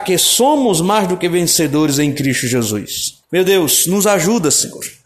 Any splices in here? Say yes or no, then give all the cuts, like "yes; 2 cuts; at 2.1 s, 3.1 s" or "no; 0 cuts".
yes; 1 cut; at 3.2 s